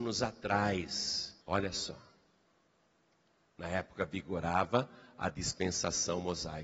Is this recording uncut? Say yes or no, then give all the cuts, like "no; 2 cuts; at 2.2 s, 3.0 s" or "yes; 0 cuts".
no; 1 cut; at 1.4 s